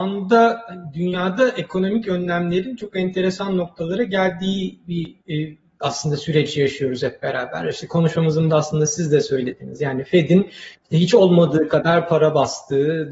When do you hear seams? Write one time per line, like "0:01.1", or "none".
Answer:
0:05.2
0:08.5